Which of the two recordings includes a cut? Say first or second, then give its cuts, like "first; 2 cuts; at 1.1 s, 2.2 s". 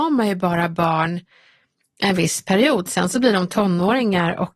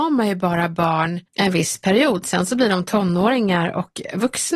second; 1 cut; at 1.3 s